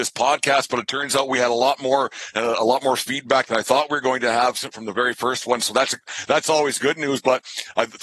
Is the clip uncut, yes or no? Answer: yes